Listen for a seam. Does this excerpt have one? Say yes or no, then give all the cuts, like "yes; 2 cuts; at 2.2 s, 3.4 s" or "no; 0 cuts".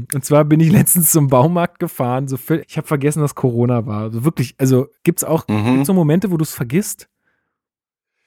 yes; 2 cuts; at 2.6 s, 5.0 s